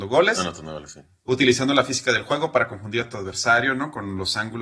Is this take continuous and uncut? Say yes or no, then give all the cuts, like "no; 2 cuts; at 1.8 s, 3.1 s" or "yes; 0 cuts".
yes; 0 cuts